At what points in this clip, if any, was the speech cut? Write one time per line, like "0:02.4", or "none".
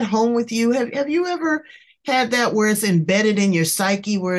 none